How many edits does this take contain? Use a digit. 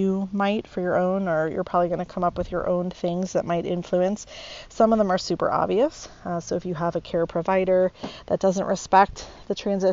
0